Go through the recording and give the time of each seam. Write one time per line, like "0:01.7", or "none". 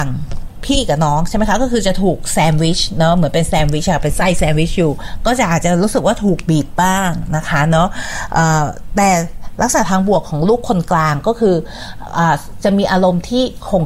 none

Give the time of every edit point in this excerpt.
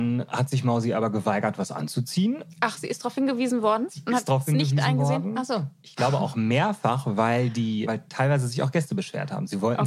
0:07.9

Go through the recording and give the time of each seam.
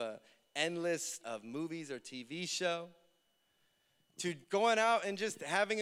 0:01.2
0:04.4

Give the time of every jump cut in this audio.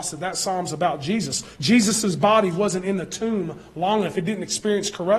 0:01.5

